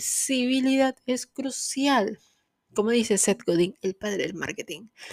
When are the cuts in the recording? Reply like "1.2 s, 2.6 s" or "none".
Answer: none